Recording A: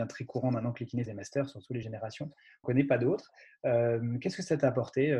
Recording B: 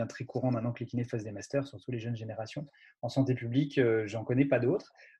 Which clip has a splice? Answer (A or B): A